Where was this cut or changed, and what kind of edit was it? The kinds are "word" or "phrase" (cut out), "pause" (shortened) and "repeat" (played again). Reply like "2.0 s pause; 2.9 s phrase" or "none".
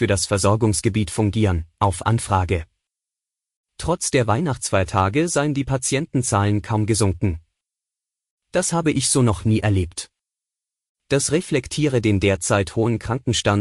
none